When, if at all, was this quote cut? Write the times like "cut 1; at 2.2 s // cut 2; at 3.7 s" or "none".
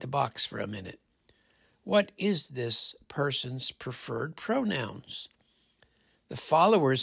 none